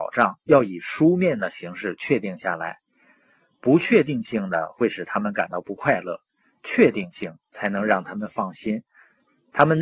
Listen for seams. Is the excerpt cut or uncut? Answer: uncut